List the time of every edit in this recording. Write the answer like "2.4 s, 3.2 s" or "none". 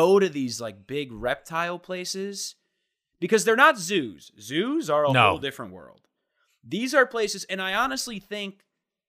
none